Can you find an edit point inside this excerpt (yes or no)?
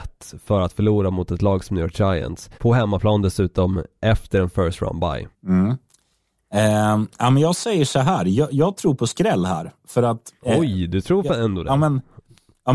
yes